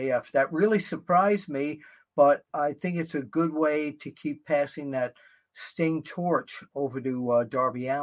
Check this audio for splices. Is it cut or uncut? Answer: uncut